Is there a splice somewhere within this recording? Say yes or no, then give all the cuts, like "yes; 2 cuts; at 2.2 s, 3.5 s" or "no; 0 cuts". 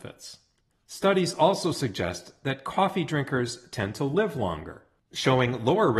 no; 0 cuts